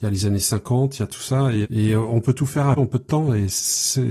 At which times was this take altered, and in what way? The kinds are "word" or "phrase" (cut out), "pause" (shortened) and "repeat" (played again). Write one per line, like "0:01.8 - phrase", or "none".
0:01.6 - word
0:02.8 - word